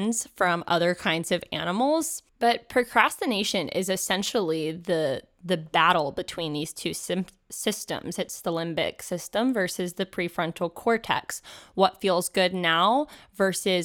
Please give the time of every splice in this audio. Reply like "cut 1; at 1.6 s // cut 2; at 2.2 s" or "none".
cut 1; at 2.3 s